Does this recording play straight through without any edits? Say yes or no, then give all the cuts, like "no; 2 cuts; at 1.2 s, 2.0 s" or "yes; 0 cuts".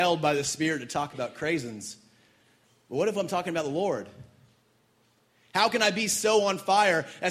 yes; 0 cuts